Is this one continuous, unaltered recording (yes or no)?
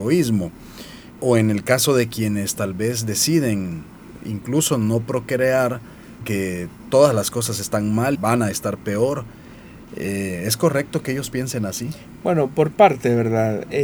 no